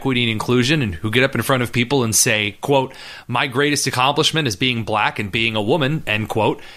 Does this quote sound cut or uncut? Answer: uncut